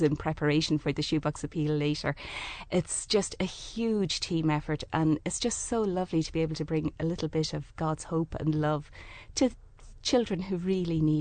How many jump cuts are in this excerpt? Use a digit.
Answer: 0